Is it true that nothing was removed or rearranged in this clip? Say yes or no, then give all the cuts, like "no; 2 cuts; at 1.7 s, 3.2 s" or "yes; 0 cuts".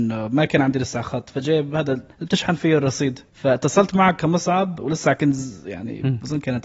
no; 2 cuts; at 2.1 s, 3.3 s